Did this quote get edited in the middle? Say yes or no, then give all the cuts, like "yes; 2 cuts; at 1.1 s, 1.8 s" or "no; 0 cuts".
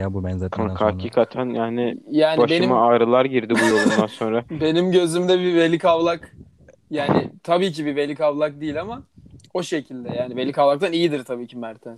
no; 0 cuts